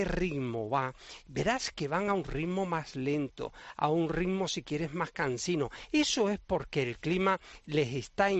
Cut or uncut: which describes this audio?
uncut